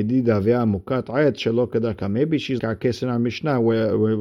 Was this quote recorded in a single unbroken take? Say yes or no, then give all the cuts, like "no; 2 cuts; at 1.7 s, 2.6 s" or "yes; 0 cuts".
no; 1 cut; at 2.6 s